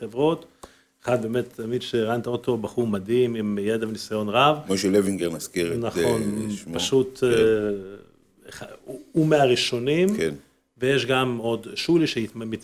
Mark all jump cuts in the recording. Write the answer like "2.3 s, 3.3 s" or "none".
none